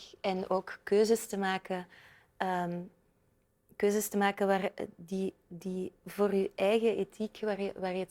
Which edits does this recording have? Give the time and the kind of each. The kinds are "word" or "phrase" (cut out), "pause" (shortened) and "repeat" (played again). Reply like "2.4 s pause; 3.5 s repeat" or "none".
none